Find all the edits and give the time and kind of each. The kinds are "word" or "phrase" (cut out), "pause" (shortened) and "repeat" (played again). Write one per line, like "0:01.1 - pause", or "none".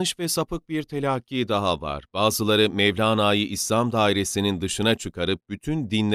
none